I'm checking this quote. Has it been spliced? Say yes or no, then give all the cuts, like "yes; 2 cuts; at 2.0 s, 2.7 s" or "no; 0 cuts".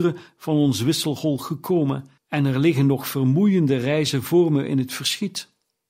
yes; 1 cut; at 2.2 s